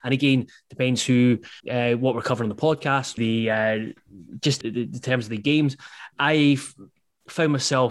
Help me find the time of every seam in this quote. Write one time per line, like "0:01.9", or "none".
0:01.6
0:03.2
0:04.6
0:06.1